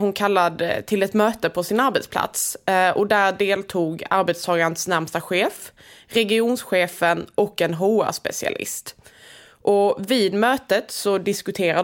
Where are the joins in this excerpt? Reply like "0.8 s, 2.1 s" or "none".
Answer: none